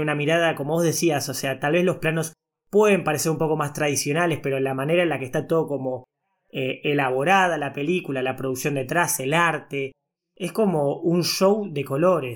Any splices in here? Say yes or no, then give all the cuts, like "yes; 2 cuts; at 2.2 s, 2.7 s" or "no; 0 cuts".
no; 0 cuts